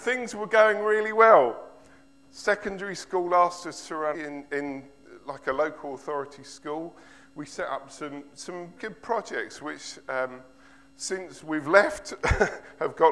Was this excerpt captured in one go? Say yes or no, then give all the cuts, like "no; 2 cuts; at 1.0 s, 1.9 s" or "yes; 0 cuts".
no; 2 cuts; at 4.1 s, 8.8 s